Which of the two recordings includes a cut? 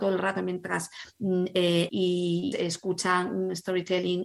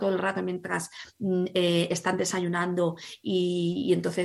first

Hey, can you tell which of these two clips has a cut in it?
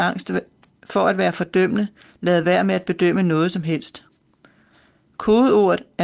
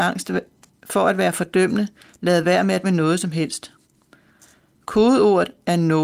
second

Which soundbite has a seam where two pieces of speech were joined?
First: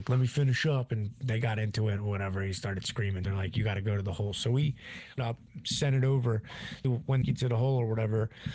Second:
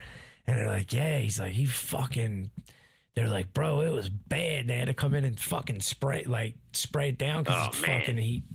first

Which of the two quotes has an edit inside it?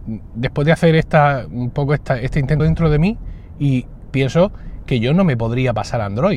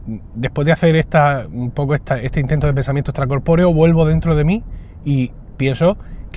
first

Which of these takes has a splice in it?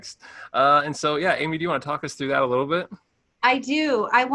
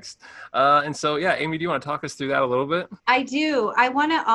second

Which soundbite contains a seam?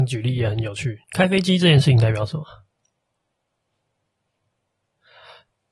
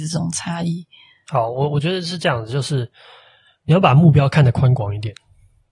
first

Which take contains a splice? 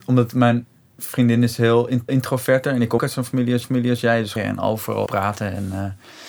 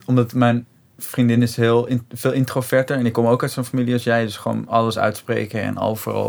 first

